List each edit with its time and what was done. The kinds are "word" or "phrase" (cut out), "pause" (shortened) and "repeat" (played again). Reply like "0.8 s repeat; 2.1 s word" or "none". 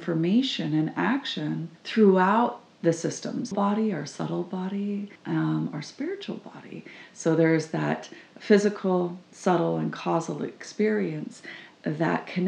1.8 s pause; 3.5 s phrase; 5.2 s pause

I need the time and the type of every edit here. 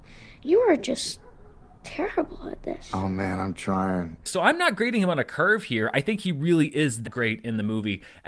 1.6 s pause; 7.0 s word

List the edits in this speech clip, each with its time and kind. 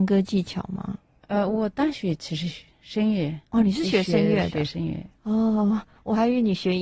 none

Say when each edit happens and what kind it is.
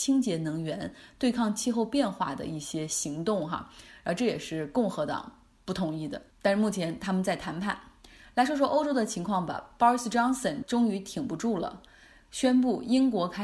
6.3 s pause

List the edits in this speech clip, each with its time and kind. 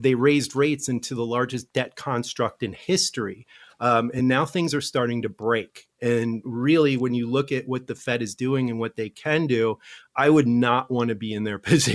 none

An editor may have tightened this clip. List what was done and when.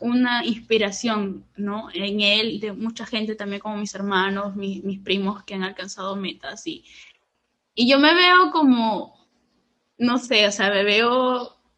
none

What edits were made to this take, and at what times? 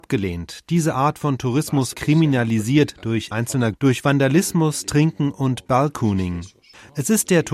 1.9 s word; 3.3 s phrase; 3.7 s word

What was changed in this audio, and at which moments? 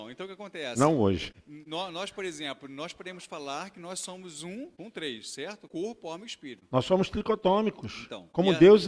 none

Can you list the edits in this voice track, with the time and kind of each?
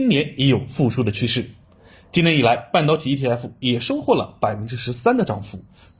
none

